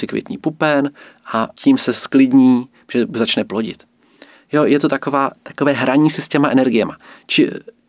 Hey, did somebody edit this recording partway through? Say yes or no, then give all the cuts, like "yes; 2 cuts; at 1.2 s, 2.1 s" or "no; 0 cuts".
no; 0 cuts